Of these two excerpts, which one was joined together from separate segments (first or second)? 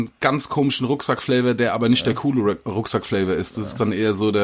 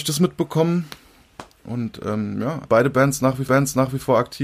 second